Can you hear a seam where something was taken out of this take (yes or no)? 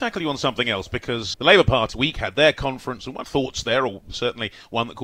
yes